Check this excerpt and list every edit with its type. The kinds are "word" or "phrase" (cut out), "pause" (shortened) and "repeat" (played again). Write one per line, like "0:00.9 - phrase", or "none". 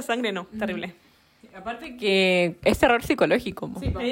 none